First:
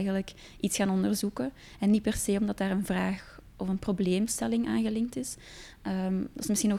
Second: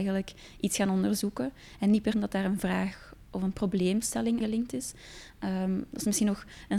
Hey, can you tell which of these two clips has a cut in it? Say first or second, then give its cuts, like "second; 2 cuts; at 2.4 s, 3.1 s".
second; 2 cuts; at 2.1 s, 4.4 s